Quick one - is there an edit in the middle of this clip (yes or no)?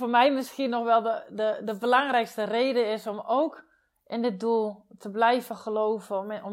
no